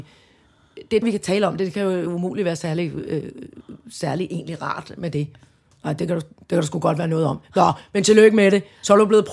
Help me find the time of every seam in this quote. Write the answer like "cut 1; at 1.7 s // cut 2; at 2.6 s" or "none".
cut 1; at 1.0 s